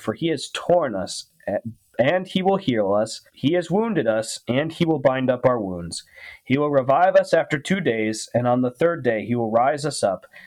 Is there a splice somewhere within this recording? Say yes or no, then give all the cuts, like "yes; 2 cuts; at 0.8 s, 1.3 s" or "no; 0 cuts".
yes; 1 cut; at 3.3 s